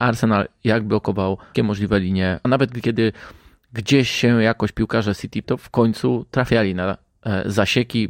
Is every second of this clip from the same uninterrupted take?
no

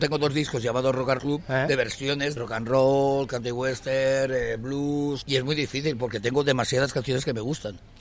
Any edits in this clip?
yes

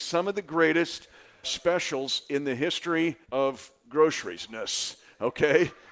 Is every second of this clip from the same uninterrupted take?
no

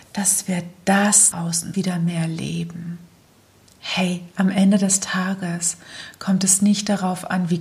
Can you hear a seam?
yes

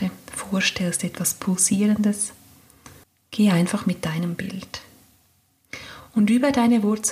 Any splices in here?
yes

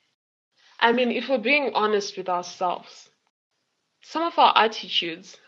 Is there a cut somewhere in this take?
no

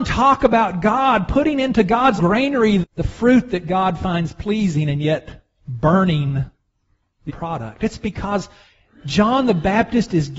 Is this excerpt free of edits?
no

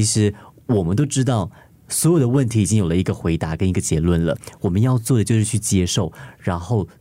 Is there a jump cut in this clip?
no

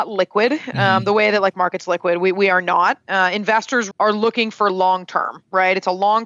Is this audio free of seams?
no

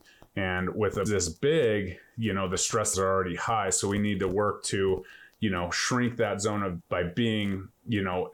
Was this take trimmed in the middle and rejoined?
yes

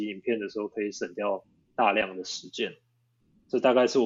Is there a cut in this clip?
no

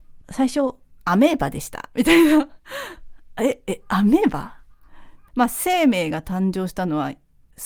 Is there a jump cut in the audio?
yes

